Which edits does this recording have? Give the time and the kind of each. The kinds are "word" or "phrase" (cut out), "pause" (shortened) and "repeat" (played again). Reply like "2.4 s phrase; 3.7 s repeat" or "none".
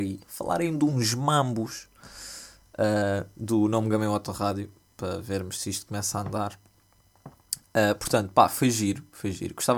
none